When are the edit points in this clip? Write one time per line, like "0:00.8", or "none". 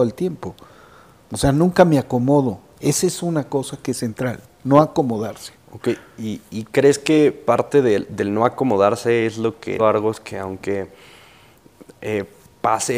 0:09.8